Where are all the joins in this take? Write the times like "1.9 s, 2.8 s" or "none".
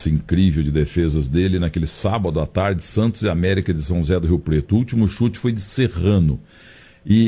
none